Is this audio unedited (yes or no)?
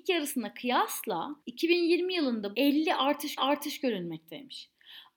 no